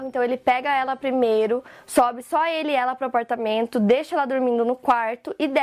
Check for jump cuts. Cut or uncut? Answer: uncut